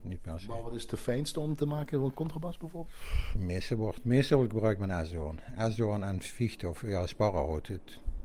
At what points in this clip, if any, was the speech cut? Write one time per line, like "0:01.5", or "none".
none